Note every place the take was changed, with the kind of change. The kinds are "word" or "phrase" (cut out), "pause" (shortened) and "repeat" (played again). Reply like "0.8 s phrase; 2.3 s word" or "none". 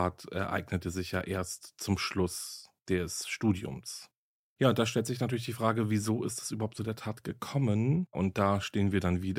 none